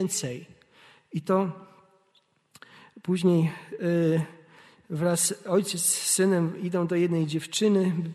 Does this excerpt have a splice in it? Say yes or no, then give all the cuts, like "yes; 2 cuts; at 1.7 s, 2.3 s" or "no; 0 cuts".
no; 0 cuts